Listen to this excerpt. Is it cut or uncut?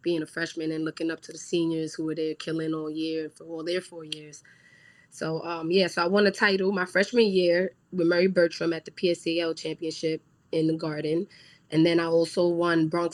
uncut